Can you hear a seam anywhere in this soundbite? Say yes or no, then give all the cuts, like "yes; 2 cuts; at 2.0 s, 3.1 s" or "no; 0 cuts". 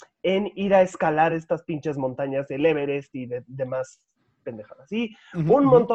no; 0 cuts